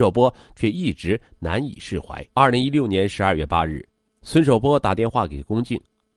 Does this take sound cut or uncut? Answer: cut